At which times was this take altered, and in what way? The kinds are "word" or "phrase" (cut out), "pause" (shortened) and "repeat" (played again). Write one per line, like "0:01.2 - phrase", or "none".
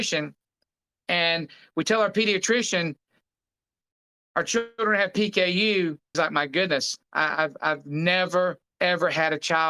0:06.1 - word